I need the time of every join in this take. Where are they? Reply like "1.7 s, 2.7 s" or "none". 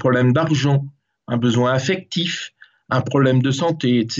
none